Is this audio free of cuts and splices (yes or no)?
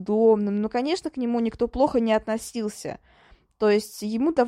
yes